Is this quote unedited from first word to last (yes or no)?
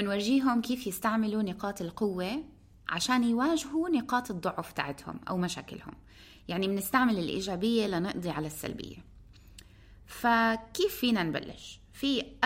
yes